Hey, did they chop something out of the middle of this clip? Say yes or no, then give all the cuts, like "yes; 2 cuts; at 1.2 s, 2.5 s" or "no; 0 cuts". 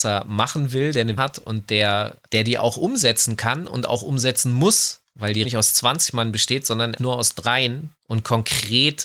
yes; 5 cuts; at 1.2 s, 2.2 s, 5.4 s, 7.0 s, 8.0 s